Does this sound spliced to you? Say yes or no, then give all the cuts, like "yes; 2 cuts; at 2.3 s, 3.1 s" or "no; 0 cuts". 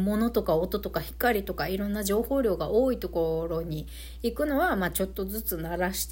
no; 0 cuts